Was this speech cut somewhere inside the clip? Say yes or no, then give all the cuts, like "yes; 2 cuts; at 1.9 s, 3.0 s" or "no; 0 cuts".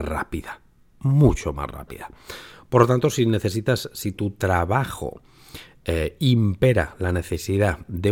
no; 0 cuts